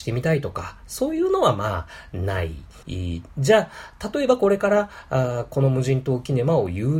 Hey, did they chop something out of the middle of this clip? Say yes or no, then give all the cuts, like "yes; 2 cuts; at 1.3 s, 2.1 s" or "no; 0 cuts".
yes; 1 cut; at 2.8 s